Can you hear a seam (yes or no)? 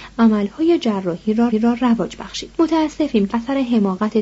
yes